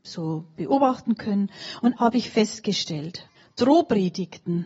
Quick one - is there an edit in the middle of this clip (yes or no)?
yes